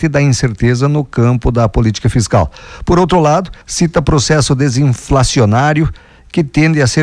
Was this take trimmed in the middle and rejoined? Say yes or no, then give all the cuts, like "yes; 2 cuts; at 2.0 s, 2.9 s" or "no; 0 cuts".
yes; 1 cut; at 3.6 s